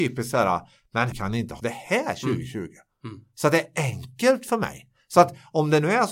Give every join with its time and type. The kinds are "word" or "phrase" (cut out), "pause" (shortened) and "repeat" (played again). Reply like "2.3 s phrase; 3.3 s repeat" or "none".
1.1 s word; 1.6 s word